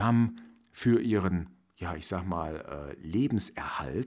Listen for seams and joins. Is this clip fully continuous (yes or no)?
yes